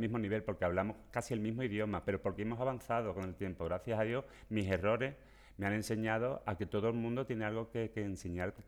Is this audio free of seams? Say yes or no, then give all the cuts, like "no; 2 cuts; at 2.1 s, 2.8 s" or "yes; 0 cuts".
yes; 0 cuts